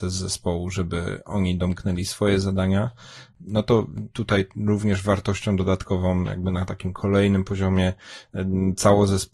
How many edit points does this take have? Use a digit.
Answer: 0